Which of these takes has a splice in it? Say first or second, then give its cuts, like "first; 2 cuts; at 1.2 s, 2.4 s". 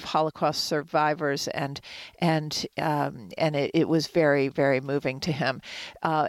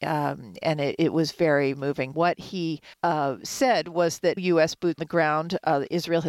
second; 5 cuts; at 1.7 s, 2.1 s, 2.9 s, 4.4 s, 5.0 s